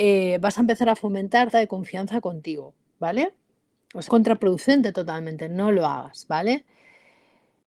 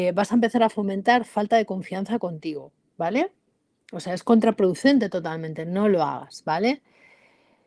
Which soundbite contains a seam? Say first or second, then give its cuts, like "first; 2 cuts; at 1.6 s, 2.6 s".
first; 2 cuts; at 1.5 s, 4.1 s